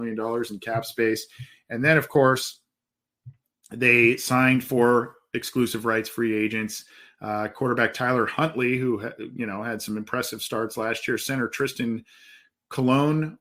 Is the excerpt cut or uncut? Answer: uncut